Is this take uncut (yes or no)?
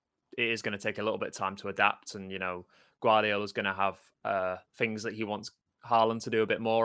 no